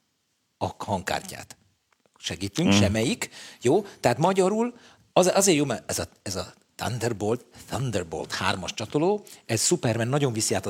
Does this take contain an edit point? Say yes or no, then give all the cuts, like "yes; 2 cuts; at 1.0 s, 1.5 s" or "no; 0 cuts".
no; 0 cuts